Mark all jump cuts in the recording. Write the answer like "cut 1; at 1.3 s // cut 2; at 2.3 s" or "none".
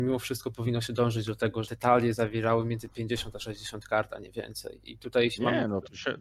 cut 1; at 1.6 s